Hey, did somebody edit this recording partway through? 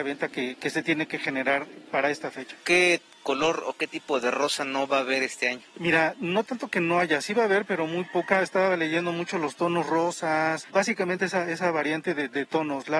no; 0 cuts

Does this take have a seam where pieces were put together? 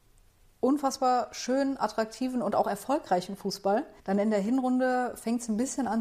yes; 1 cut; at 4.0 s

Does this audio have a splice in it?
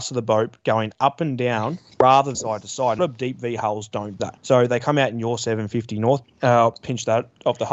yes; 4 cuts; at 2.3 s, 3.0 s, 4.2 s, 6.2 s

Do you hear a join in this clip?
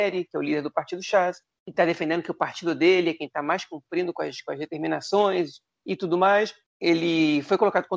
no; 0 cuts

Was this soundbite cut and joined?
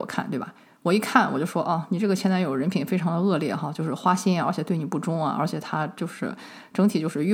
no; 0 cuts

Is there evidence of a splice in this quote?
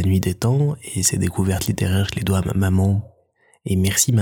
no; 0 cuts

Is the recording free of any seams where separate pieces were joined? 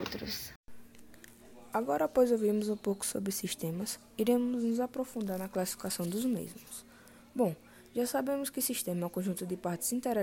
yes; 0 cuts

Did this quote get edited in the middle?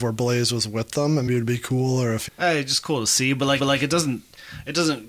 yes; 3 cuts; at 1.3 s, 2.3 s, 3.6 s

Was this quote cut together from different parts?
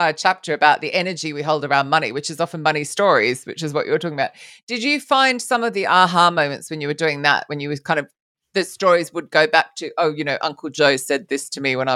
no; 0 cuts

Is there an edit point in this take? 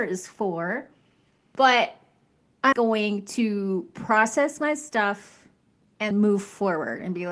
yes; 2 cuts; at 2.7 s, 6.1 s

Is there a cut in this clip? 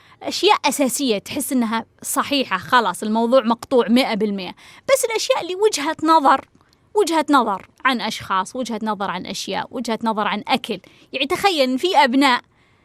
yes; 1 cut; at 7.7 s

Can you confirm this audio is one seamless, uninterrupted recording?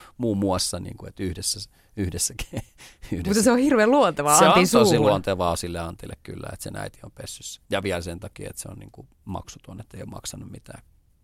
no; 2 cuts; at 7.7 s, 9.1 s

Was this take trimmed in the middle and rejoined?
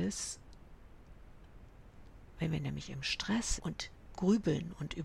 yes; 1 cut; at 3.6 s

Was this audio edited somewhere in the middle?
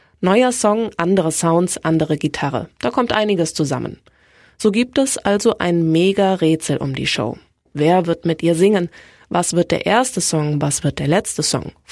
no; 0 cuts

